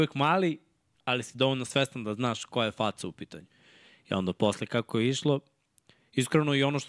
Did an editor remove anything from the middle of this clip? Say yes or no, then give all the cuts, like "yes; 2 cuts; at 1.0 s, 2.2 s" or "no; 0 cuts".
no; 0 cuts